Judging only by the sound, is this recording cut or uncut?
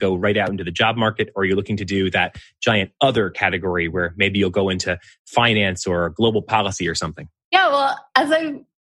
uncut